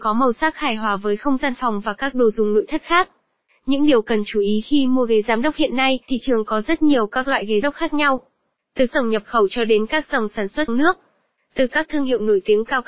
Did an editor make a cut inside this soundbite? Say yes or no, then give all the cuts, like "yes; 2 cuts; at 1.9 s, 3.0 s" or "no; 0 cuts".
yes; 4 cuts; at 6.1 s, 7.6 s, 8.9 s, 10.7 s